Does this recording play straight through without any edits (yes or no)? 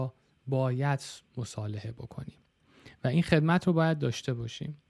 yes